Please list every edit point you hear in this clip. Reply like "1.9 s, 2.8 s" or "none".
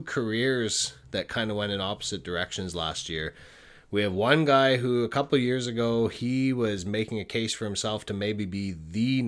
none